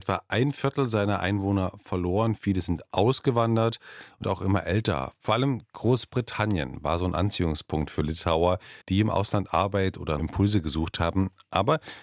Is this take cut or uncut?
cut